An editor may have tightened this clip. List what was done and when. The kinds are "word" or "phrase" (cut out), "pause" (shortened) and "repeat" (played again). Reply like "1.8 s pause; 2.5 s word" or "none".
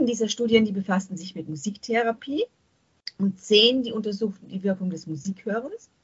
none